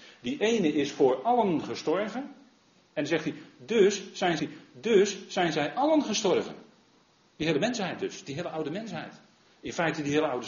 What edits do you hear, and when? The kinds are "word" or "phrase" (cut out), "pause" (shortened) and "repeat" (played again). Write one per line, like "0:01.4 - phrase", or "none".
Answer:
0:04.4 - repeat
0:07.1 - pause

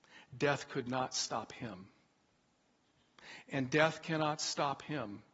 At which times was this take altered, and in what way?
none

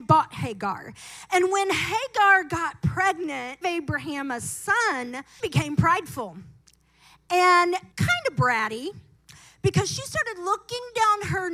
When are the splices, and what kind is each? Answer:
0:03.6 - phrase
0:05.4 - word
0:07.9 - pause

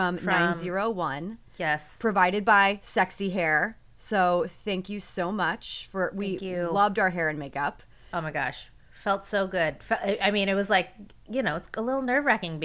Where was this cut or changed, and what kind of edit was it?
none

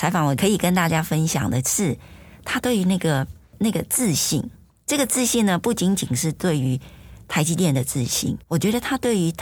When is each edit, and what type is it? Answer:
0:08.4 - pause

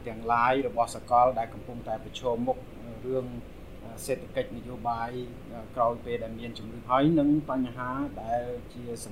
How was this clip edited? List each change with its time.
0:06.8 - word

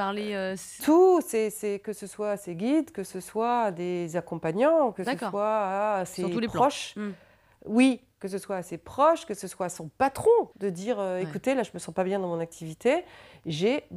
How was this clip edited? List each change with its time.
0:10.5 - pause

